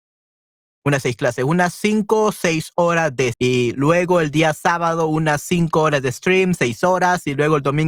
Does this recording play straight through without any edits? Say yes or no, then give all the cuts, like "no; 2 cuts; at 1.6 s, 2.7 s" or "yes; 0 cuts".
no; 1 cut; at 3.3 s